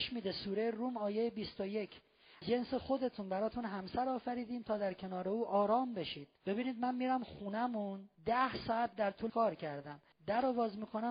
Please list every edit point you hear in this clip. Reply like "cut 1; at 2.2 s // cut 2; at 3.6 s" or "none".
cut 1; at 2.4 s // cut 2; at 6.4 s // cut 3; at 8.1 s // cut 4; at 9.3 s // cut 5; at 10.1 s